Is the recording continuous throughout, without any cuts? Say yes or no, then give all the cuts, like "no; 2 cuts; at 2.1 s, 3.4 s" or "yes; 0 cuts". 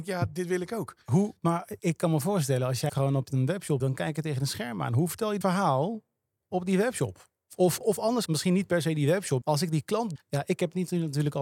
no; 8 cuts; at 1.8 s, 2.9 s, 3.8 s, 5.4 s, 7.8 s, 8.3 s, 9.4 s, 10.2 s